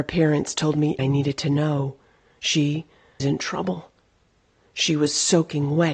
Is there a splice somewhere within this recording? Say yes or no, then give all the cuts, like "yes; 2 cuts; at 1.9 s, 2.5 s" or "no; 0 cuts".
yes; 2 cuts; at 1.0 s, 3.2 s